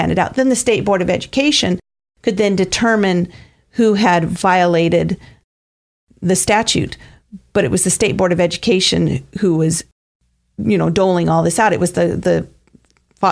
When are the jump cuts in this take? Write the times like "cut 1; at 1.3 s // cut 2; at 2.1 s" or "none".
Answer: none